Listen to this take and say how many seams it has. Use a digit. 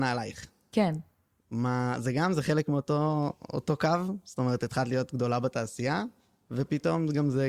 0